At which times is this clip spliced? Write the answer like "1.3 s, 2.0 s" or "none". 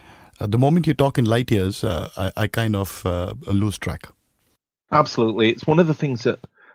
none